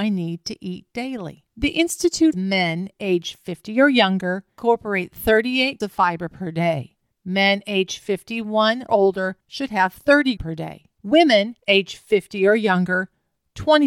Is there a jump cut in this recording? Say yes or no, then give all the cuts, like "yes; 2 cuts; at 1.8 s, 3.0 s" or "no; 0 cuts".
yes; 7 cuts; at 1.5 s, 2.3 s, 5.8 s, 8.9 s, 9.4 s, 10.4 s, 11.6 s